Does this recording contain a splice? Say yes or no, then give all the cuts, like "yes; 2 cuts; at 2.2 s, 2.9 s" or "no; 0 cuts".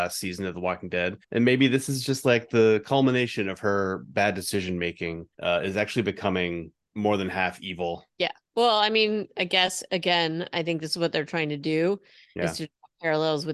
yes; 4 cuts; at 1.2 s, 5.3 s, 6.8 s, 8.1 s